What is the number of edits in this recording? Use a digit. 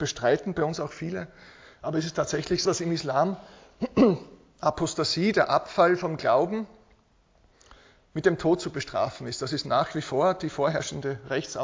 1